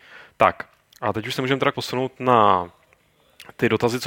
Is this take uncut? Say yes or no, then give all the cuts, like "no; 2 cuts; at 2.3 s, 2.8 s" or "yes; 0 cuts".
no; 1 cut; at 1.7 s